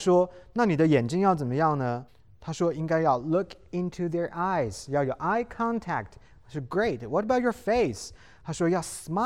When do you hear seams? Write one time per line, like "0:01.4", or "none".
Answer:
0:02.1